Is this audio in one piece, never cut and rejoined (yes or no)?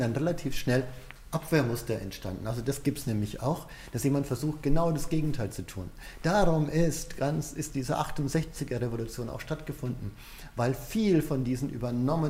yes